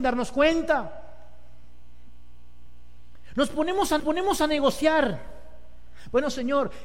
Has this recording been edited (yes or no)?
yes